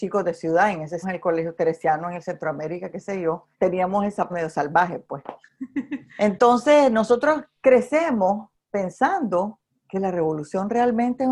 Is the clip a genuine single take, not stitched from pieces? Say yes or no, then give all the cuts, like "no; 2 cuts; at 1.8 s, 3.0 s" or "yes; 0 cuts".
no; 5 cuts; at 1.0 s, 3.5 s, 4.3 s, 6.1 s, 9.7 s